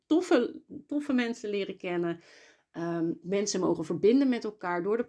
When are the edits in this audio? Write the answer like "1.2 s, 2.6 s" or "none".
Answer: 3.2 s